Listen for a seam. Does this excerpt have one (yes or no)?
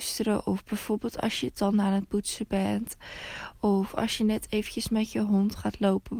no